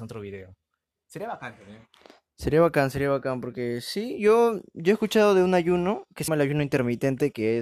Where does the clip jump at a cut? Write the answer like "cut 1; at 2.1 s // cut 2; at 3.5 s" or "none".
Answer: cut 1; at 6.3 s